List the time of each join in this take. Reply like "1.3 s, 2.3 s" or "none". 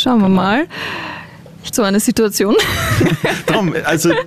1.7 s